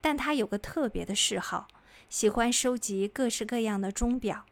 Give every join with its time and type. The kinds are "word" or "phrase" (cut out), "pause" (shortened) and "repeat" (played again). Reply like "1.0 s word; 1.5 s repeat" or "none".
none